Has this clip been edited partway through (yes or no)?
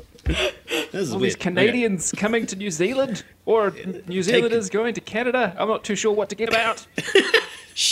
yes